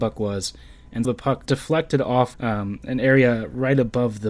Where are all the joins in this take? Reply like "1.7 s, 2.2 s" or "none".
1.0 s, 1.5 s, 2.3 s

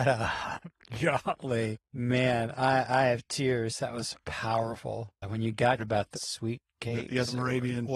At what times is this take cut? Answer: 1.8 s, 5.2 s, 5.8 s, 6.1 s

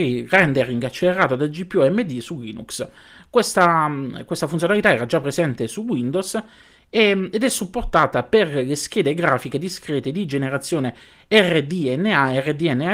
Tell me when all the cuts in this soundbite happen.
none

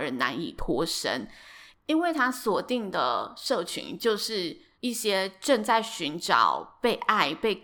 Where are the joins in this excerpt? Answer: 4.7 s

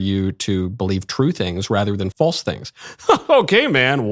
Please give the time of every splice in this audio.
2.1 s

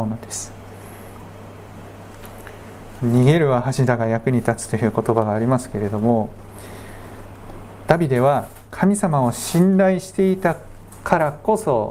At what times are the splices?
8.7 s

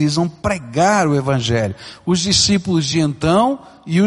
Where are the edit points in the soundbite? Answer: none

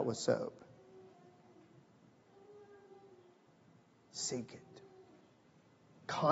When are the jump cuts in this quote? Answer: none

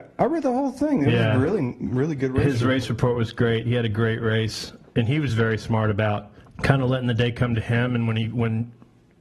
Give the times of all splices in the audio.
none

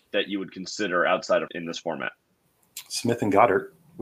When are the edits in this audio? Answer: 1.5 s

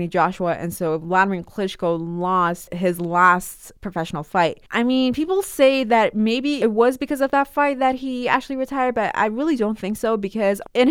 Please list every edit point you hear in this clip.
4.7 s

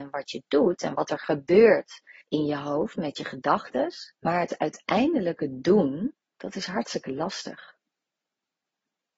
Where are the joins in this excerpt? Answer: 2.2 s, 4.1 s, 6.2 s

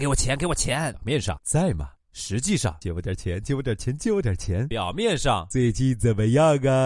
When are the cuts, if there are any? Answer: 1.4 s

